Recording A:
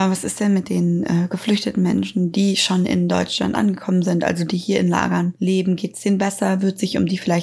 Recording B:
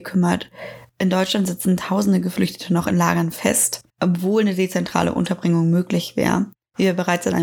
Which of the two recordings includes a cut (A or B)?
B